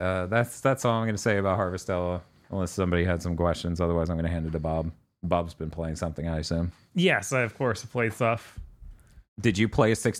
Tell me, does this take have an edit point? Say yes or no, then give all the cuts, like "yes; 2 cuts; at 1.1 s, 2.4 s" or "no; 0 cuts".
no; 0 cuts